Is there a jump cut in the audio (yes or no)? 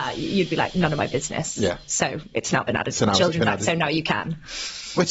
no